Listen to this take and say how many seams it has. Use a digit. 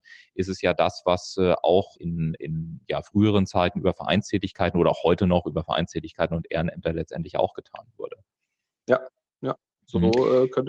1